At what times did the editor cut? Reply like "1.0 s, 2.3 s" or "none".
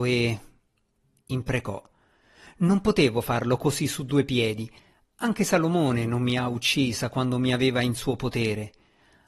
none